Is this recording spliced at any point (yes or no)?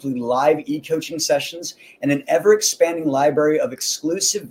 no